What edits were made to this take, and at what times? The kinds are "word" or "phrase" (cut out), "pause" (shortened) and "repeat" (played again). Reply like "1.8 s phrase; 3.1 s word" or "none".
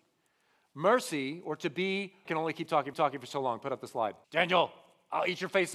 2.2 s phrase; 2.9 s repeat; 4.2 s pause